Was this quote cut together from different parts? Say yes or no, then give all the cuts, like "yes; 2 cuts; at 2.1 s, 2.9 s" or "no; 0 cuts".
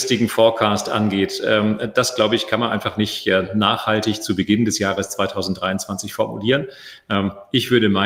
no; 0 cuts